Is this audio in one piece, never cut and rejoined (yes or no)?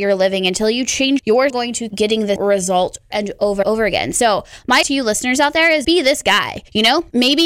no